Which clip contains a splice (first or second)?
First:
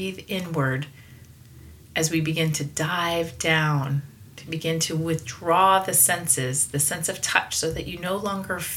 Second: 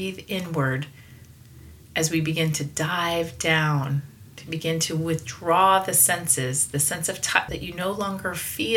second